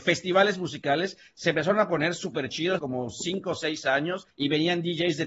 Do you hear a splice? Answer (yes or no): yes